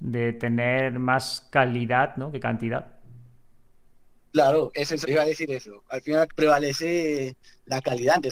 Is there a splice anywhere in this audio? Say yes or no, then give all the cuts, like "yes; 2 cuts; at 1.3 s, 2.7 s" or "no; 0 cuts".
yes; 3 cuts; at 4.7 s, 5.0 s, 6.3 s